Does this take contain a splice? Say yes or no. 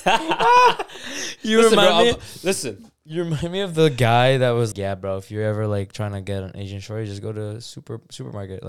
yes